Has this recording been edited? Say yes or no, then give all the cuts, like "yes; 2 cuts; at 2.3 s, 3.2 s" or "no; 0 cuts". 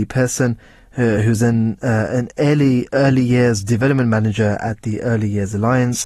no; 0 cuts